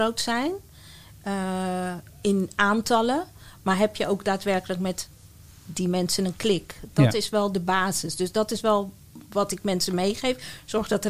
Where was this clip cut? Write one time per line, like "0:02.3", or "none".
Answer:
0:02.1